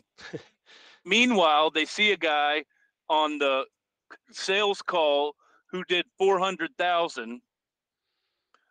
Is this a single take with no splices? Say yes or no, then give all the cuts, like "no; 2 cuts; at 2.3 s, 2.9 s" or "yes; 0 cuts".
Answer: yes; 0 cuts